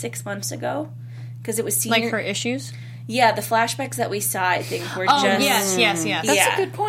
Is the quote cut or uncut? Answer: uncut